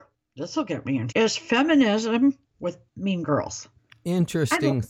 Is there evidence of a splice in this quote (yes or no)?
yes